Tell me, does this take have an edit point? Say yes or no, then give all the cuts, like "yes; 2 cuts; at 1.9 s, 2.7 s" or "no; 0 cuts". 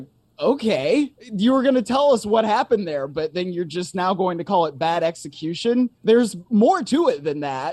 yes; 2 cuts; at 1.1 s, 6.0 s